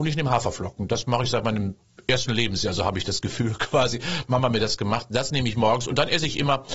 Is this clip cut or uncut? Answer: uncut